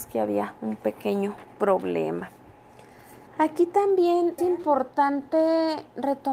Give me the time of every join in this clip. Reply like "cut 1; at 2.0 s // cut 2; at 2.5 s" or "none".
cut 1; at 3.3 s // cut 2; at 4.4 s